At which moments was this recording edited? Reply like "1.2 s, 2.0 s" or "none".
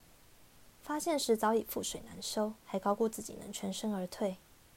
2.6 s